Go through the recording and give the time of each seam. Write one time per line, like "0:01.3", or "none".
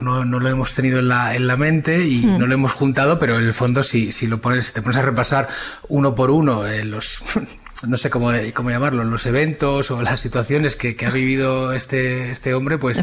none